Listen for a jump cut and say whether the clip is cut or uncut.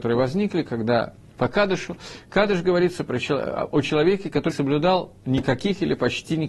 cut